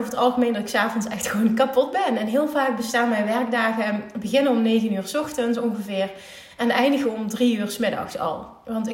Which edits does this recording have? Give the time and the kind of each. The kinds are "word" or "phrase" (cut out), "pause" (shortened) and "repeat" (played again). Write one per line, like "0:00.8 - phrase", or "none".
none

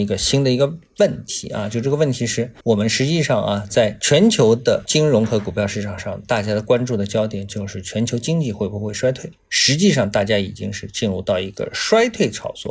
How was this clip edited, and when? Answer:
0:02.6 - pause

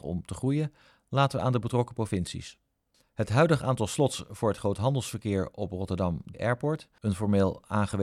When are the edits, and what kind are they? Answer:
0:06.3 - word

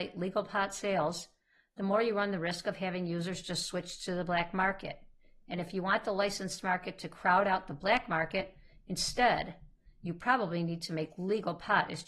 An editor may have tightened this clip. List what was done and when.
none

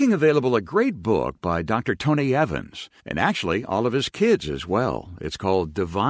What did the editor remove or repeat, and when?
0:03.0 - pause

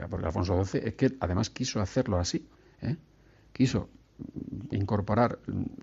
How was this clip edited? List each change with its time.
0:02.5 - pause

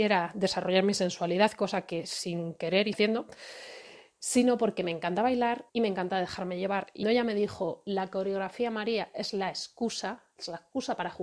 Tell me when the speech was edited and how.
0:02.9 - phrase
0:05.7 - pause
0:07.0 - phrase

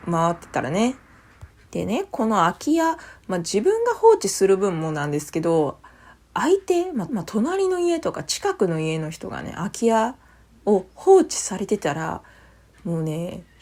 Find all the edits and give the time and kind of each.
0:07.1 - repeat

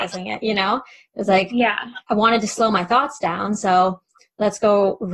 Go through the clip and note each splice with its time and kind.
none

